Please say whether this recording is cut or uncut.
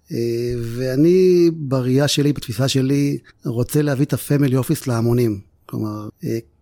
uncut